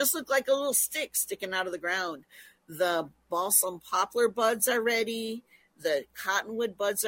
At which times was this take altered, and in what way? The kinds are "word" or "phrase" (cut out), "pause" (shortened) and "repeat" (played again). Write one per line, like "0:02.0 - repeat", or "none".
none